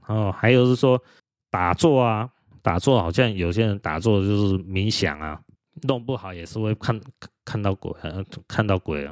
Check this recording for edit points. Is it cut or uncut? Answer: cut